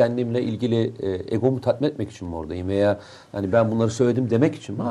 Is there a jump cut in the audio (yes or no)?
no